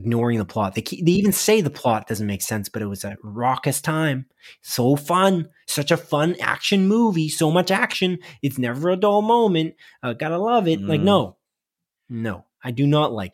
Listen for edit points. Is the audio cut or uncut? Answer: uncut